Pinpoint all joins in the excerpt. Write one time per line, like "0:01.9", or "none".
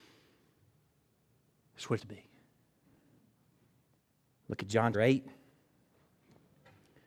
0:02.0
0:04.9